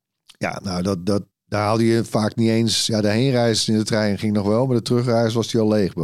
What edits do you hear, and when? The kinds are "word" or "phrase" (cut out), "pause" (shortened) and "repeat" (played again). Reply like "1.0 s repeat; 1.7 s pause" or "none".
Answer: 1.3 s word